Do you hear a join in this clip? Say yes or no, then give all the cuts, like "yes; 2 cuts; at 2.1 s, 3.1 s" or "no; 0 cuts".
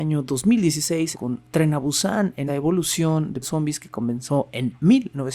yes; 3 cuts; at 1.1 s, 2.5 s, 3.4 s